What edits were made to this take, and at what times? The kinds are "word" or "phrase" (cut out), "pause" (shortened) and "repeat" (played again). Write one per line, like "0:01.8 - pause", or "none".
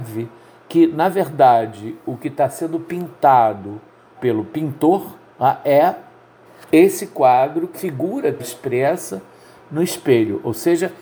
0:04.2 - word
0:05.3 - pause
0:06.5 - pause
0:07.7 - phrase
0:08.4 - word